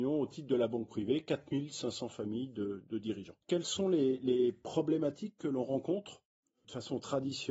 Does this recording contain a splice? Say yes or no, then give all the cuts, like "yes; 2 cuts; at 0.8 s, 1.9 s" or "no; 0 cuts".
yes; 1 cut; at 3.4 s